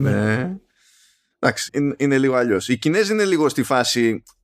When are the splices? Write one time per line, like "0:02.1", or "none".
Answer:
0:01.7